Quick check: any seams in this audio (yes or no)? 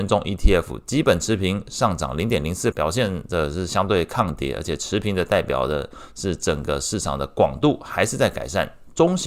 yes